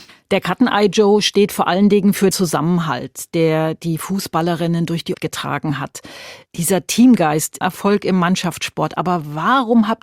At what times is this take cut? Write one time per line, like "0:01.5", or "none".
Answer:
0:02.3
0:05.1
0:06.5
0:07.6